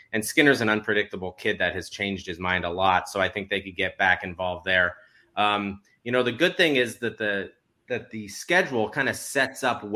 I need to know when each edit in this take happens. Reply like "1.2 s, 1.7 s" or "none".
none